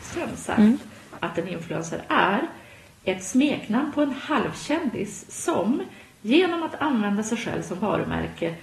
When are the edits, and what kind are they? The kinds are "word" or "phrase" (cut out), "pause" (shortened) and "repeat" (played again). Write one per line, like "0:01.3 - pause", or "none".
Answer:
none